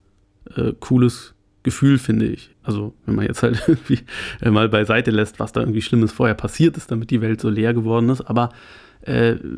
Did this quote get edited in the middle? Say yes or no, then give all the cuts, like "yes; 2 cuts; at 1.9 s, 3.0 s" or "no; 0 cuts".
yes; 1 cut; at 2.5 s